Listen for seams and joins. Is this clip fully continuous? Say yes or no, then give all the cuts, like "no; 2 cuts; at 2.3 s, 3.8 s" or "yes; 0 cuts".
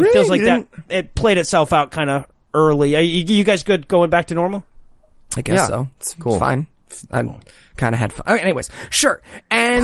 yes; 0 cuts